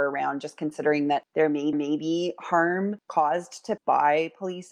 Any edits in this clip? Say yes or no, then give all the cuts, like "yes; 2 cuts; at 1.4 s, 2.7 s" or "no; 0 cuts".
yes; 2 cuts; at 1.7 s, 3.8 s